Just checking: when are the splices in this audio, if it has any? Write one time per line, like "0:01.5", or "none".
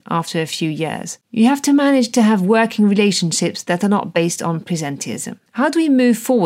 0:05.5